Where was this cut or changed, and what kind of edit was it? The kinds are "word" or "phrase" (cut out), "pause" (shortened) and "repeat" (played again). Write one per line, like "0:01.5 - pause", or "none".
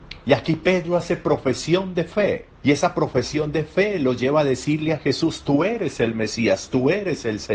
0:02.5 - pause